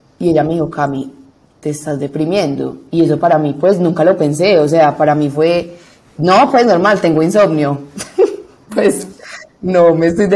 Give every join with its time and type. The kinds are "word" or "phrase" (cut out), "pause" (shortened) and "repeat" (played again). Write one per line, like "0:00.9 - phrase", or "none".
none

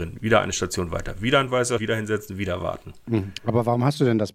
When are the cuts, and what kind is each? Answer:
0:01.8 - word

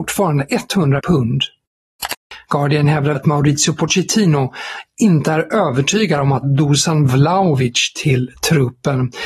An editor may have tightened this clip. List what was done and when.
0:01.0 - word
0:03.1 - word
0:06.4 - word

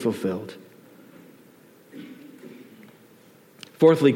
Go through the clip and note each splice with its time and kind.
none

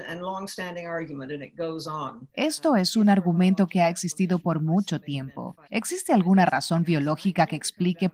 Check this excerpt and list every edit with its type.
0:05.6 - pause

